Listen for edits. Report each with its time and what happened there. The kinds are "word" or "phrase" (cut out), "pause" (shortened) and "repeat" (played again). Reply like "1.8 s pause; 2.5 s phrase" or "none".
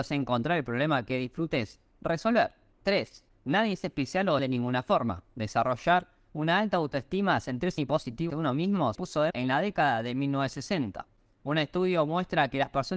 4.4 s word; 7.8 s word; 8.3 s word; 8.9 s word; 9.3 s word